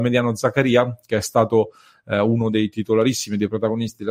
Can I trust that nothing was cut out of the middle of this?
yes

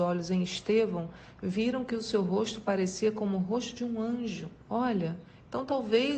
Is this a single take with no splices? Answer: no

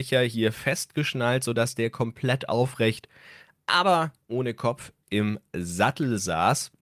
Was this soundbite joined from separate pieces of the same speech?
no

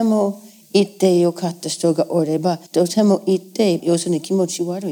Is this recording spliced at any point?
yes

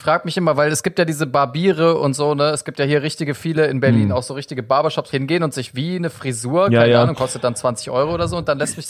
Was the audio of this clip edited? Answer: yes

